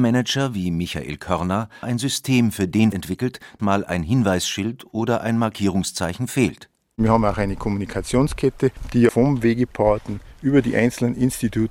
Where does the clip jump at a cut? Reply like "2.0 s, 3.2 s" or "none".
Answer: 1.8 s, 2.9 s, 3.6 s, 9.1 s